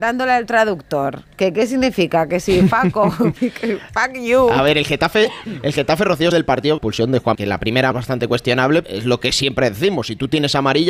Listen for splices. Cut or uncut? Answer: cut